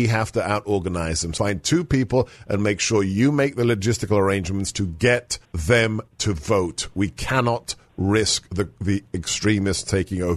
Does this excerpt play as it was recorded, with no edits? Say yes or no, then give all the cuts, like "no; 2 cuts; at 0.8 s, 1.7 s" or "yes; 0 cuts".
no; 2 cuts; at 1.4 s, 5.4 s